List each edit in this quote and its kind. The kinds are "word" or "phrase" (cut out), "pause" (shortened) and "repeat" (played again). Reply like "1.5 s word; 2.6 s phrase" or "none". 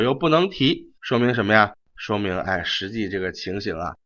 1.0 s pause